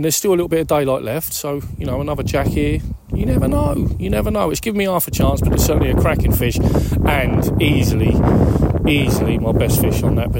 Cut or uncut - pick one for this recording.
uncut